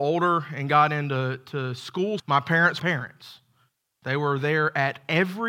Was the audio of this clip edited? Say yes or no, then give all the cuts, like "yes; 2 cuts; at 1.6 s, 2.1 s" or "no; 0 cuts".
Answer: yes; 2 cuts; at 2.2 s, 2.8 s